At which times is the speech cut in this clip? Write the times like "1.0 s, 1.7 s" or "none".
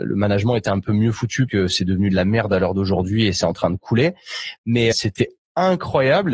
1.5 s, 4.9 s